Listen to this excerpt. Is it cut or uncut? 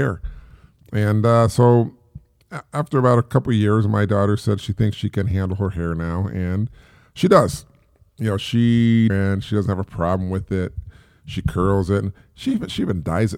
cut